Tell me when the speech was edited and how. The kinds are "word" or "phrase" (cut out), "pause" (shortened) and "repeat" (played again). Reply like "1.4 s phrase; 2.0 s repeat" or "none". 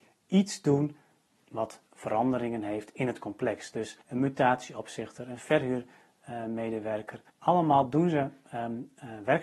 1.9 s pause; 4.0 s pause; 7.3 s pause

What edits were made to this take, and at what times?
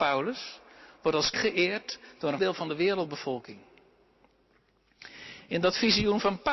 1.3 s word; 2.4 s word

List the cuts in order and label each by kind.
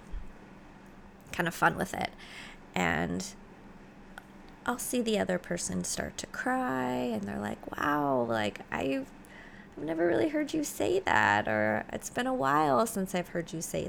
none

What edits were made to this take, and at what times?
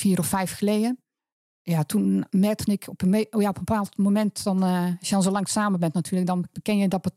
none

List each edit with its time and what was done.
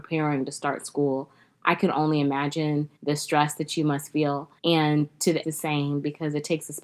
3.0 s pause; 4.6 s pause; 5.4 s word

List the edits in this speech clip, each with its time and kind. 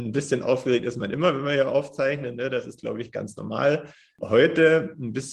none

